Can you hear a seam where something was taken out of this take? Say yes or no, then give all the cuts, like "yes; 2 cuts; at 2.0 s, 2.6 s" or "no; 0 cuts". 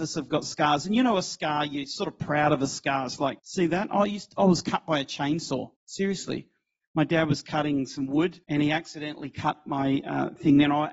yes; 3 cuts; at 3.4 s, 5.8 s, 8.4 s